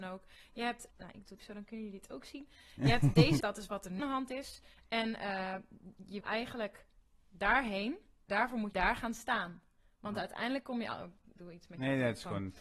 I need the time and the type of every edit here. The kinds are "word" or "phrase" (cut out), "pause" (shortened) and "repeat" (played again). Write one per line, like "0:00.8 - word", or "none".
0:00.9 - word
0:01.4 - word
0:03.4 - word
0:04.0 - word
0:06.2 - word
0:08.3 - word
0:08.7 - word
0:11.3 - word